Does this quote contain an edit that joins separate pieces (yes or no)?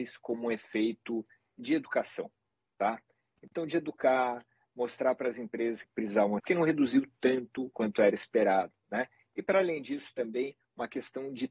yes